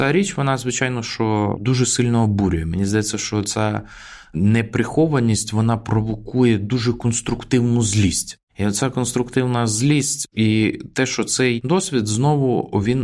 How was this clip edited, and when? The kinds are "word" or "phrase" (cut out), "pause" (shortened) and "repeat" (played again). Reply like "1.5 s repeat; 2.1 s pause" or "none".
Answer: 8.5 s pause